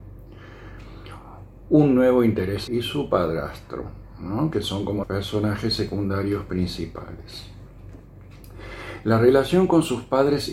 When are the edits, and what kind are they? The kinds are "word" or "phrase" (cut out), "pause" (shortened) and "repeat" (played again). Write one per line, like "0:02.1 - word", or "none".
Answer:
0:02.7 - phrase
0:05.0 - word